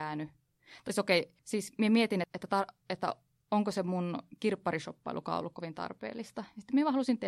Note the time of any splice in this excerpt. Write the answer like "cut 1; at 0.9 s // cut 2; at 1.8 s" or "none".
cut 1; at 1.4 s // cut 2; at 2.2 s // cut 3; at 2.8 s